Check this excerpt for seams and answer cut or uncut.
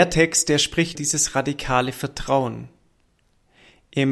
cut